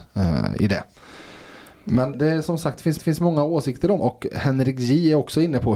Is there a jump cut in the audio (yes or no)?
yes